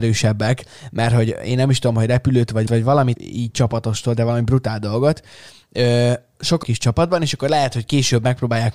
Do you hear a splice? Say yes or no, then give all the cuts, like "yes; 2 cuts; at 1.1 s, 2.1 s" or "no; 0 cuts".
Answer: yes; 3 cuts; at 2.7 s, 3.1 s, 6.6 s